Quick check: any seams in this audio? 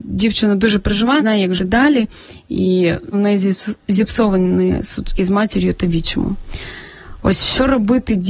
yes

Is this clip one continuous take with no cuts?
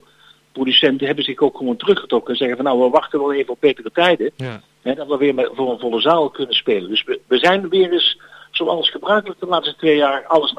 yes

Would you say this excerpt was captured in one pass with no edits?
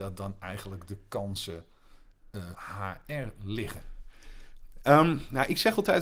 no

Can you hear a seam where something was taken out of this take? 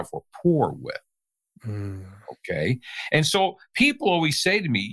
no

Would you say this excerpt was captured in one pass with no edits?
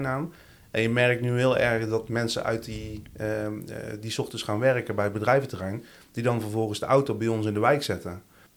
yes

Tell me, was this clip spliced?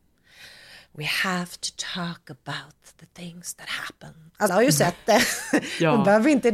yes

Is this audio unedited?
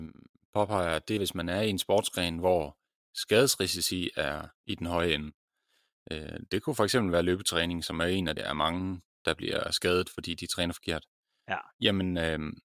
no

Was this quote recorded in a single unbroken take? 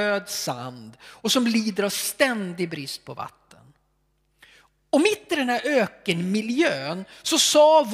yes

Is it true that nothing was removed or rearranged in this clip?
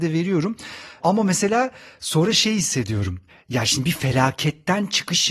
yes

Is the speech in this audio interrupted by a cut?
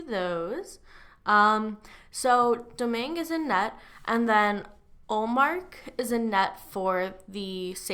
no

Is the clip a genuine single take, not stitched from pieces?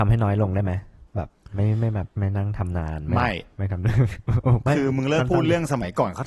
no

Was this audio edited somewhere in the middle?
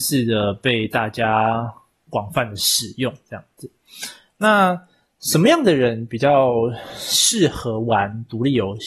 no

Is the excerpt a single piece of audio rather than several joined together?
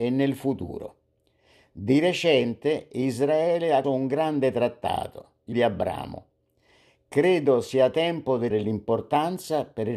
no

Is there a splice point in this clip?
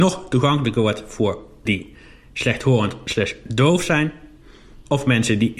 yes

